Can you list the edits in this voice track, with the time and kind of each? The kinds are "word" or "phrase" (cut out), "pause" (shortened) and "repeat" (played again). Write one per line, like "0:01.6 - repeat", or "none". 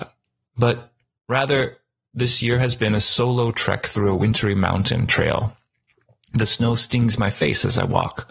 none